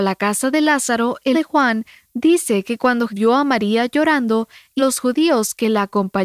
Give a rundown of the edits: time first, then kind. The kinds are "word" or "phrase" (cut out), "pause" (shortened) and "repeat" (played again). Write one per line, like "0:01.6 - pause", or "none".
0:01.3 - word
0:03.1 - word
0:04.8 - word